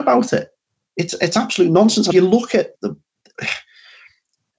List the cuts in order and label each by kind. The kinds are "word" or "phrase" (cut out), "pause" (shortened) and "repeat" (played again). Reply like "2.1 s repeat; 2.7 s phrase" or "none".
2.1 s phrase; 2.7 s word